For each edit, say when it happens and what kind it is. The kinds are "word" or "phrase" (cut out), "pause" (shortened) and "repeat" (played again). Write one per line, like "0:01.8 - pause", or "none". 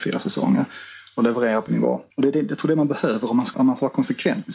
0:01.7 - word
0:02.1 - pause
0:03.5 - word